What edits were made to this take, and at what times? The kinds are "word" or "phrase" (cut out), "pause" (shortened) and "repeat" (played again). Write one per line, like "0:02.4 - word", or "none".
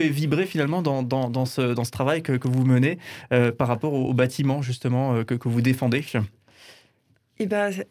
none